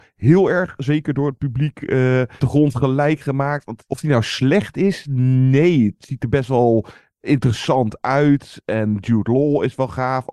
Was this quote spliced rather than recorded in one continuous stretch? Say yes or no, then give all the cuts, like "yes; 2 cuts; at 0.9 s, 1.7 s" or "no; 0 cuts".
yes; 1 cut; at 2.4 s